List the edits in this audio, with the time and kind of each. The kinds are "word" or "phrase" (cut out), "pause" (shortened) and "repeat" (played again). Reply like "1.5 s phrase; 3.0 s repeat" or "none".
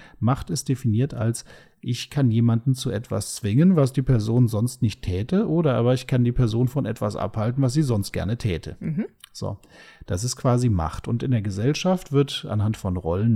none